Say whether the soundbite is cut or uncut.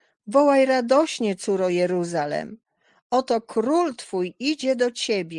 uncut